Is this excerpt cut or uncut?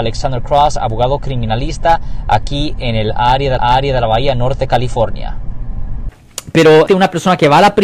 cut